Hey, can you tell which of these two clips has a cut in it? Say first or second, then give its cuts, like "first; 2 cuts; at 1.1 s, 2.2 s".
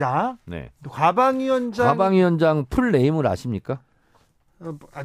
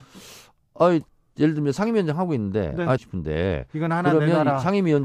second; 2 cuts; at 1.1 s, 3.0 s